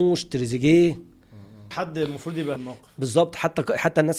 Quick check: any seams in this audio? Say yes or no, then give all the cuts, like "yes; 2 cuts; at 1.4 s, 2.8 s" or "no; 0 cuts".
yes; 2 cuts; at 1.7 s, 2.6 s